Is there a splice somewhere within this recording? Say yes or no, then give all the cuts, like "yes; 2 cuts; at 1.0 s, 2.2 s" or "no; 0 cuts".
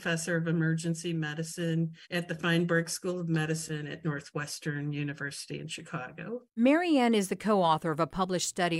yes; 2 cuts; at 2.0 s, 6.5 s